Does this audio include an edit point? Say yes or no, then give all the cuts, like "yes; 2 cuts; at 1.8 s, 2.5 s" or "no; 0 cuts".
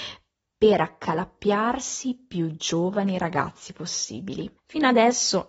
yes; 1 cut; at 4.6 s